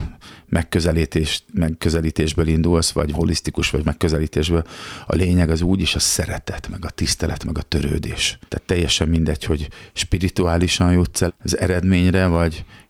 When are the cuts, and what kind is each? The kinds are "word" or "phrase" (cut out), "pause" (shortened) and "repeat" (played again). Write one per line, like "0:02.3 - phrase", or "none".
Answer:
0:03.1 - word
0:03.8 - word
0:08.5 - pause
0:11.3 - word